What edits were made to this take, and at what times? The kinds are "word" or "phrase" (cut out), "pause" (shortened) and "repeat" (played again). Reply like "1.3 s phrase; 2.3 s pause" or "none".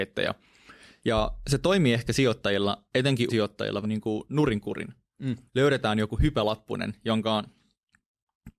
3.3 s word; 3.8 s word; 5.5 s pause